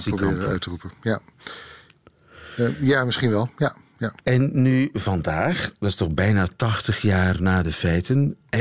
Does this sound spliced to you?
yes; 1 cut; at 4.2 s

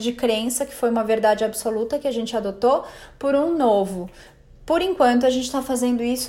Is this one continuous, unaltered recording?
yes; 0 cuts

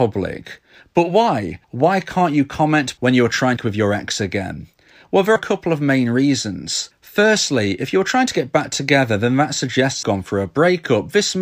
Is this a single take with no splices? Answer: no; 5 cuts; at 1.6 s, 3.0 s, 3.6 s, 5.4 s, 10.0 s

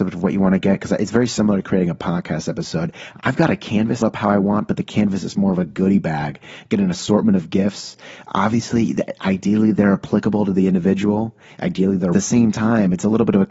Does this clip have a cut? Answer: yes; 2 cuts; at 4.0 s, 12.1 s

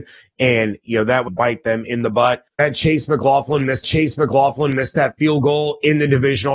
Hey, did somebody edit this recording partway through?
yes; 3 cuts; at 1.3 s, 2.6 s, 3.8 s

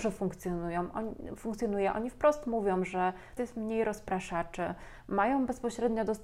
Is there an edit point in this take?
yes; 1 cut; at 3.4 s

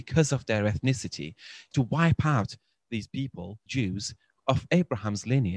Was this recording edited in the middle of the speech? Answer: yes; 3 cuts; at 1.7 s, 3.7 s, 4.4 s

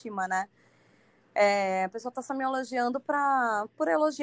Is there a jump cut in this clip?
no; 0 cuts

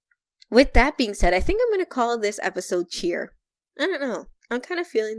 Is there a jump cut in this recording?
no; 0 cuts

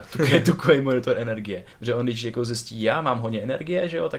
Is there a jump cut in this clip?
yes; 1 cut; at 1.7 s

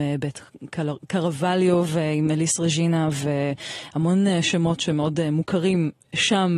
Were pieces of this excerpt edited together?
no; 0 cuts

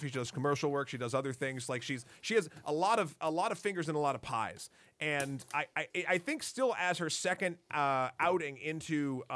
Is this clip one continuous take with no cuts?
yes; 0 cuts

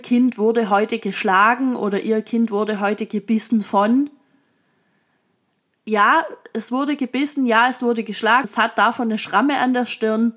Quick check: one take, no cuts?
no; 1 cut; at 8.4 s

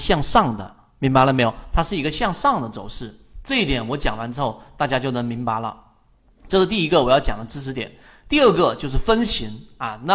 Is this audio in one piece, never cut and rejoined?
yes; 0 cuts

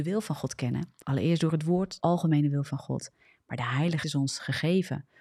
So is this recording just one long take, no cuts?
no; 3 cuts; at 1.0 s, 2.0 s, 4.0 s

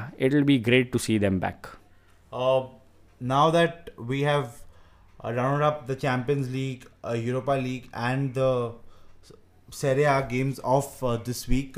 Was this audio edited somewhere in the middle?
no; 0 cuts

